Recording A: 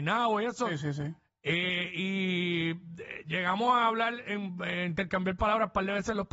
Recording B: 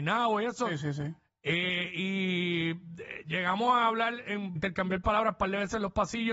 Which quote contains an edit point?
B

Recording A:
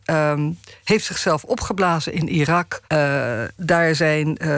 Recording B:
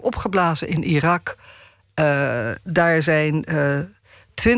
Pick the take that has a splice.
A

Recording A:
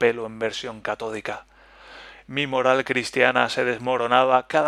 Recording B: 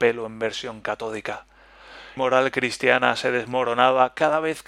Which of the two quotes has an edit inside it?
B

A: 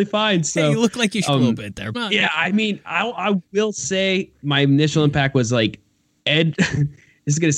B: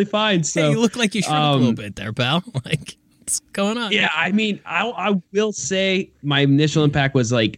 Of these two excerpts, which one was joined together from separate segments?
A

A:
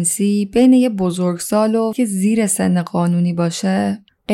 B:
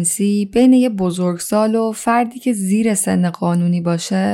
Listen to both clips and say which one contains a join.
A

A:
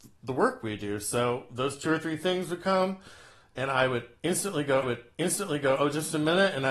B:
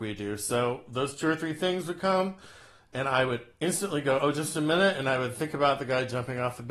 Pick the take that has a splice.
A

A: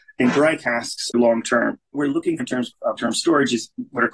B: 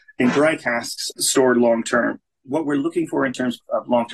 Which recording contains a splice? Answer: A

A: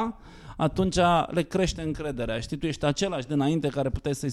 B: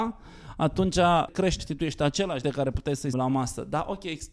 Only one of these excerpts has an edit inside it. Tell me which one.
B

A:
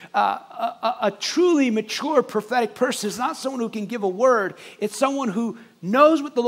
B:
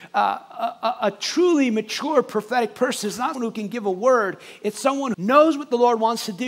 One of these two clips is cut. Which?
B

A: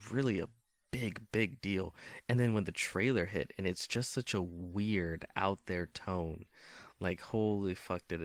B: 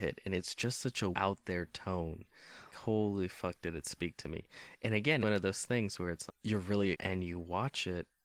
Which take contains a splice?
B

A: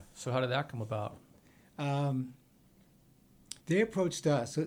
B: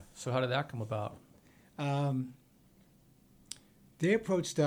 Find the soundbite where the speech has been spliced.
A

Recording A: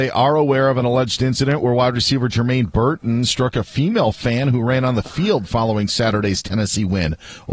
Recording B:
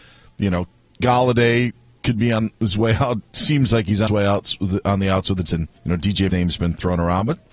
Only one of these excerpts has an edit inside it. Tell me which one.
B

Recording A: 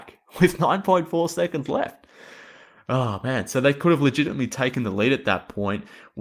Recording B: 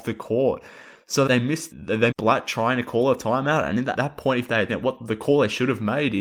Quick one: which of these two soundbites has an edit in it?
B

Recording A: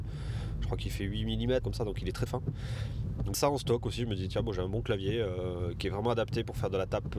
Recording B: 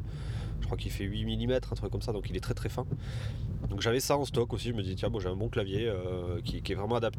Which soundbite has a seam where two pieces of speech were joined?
A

